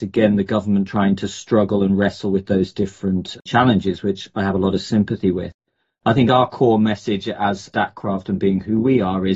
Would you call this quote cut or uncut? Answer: uncut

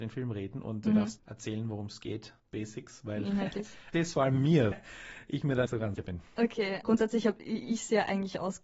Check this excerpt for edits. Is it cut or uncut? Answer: cut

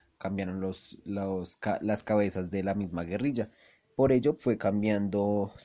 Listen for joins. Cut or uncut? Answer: cut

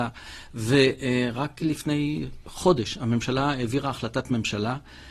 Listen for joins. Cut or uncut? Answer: uncut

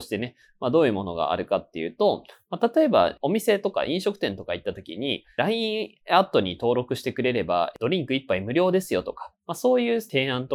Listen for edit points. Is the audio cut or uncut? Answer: uncut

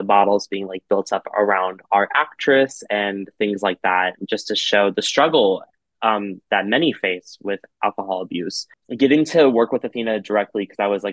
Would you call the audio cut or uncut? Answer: uncut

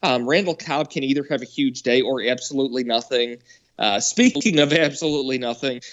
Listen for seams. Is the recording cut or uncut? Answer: uncut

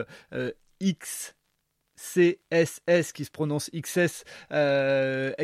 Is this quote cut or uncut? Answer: uncut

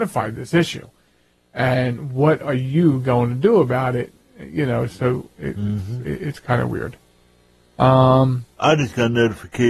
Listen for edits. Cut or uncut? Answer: uncut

